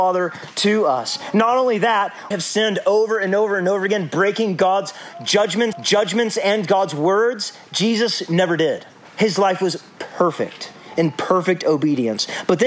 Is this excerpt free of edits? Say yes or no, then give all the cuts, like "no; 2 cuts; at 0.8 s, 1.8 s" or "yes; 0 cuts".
no; 3 cuts; at 2.3 s, 5.7 s, 9.0 s